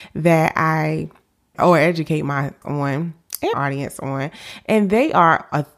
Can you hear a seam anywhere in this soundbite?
yes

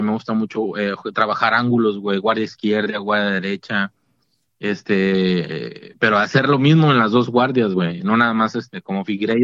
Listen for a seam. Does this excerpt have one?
no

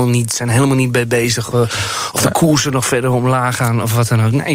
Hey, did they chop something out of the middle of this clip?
yes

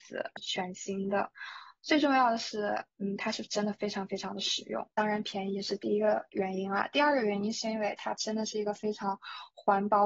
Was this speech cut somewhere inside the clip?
no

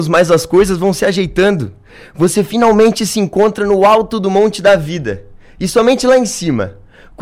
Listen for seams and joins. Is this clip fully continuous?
yes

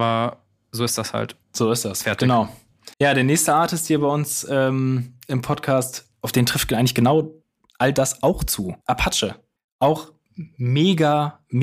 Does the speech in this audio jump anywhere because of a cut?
yes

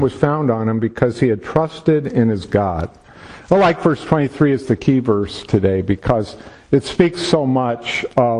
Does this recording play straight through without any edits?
yes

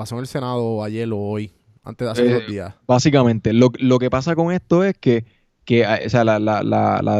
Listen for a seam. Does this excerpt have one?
no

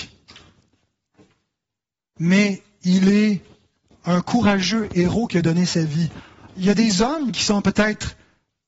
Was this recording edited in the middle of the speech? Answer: no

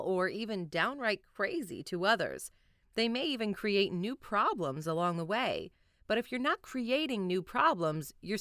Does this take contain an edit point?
no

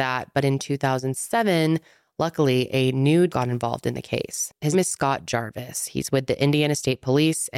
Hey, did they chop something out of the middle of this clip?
yes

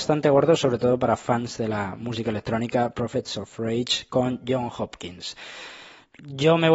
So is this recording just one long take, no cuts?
yes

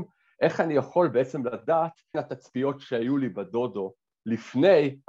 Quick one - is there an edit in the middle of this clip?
yes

